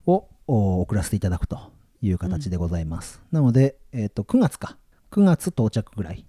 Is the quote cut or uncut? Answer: uncut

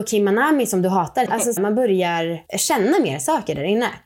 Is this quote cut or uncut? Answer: cut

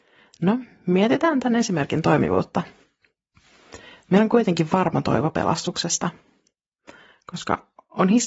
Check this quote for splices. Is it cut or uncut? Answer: uncut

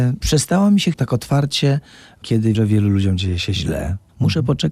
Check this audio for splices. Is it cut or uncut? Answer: cut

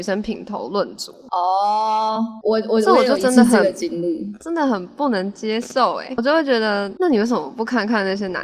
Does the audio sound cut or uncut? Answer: uncut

